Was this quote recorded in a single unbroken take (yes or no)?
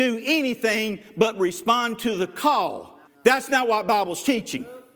no